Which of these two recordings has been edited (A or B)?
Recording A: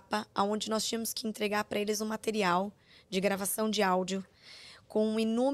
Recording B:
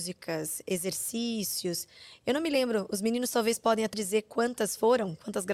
B